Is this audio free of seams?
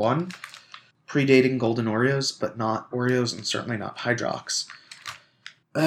no; 2 cuts; at 2.4 s, 2.9 s

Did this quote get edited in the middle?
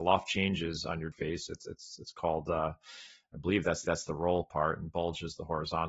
yes; 2 cuts; at 1.1 s, 3.8 s

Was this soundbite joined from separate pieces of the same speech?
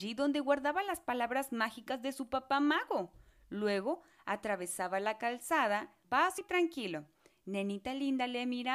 yes; 2 cuts; at 6.0 s, 6.4 s

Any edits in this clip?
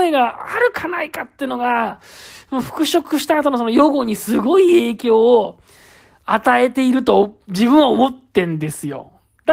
no; 0 cuts

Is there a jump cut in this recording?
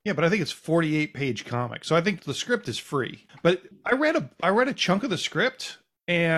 yes; 1 cut; at 2.2 s

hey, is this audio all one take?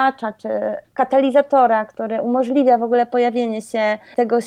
yes; 0 cuts

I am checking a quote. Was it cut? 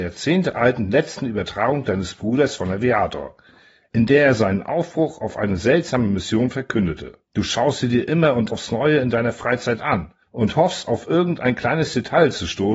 yes; 3 cuts; at 7.2 s, 8.5 s, 10.2 s

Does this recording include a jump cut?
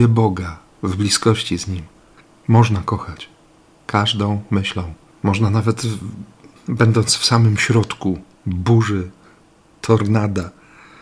yes; 4 cuts; at 2.2 s, 5.1 s, 6.6 s, 8.4 s

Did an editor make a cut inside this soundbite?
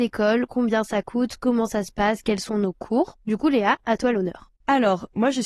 yes; 1 cut; at 3.2 s

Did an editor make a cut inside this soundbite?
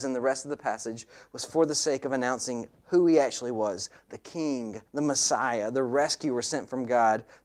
yes; 1 cut; at 4.9 s

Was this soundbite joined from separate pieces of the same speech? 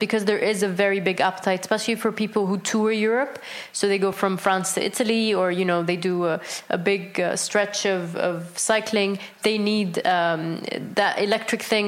no; 0 cuts

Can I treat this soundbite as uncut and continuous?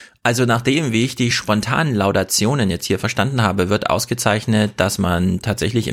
yes; 0 cuts

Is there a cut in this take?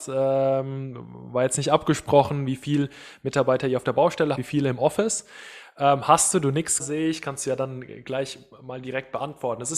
yes; 2 cuts; at 4.3 s, 6.8 s

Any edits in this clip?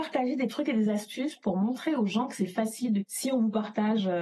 yes; 1 cut; at 3.0 s

